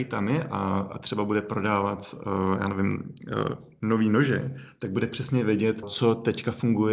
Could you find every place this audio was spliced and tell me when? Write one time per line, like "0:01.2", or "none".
0:05.8